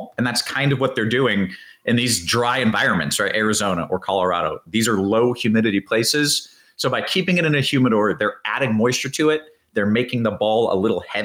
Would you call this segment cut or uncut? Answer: uncut